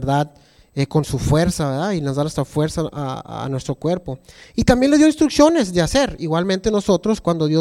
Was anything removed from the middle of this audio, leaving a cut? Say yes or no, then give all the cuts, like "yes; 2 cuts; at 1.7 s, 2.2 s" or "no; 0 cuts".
no; 0 cuts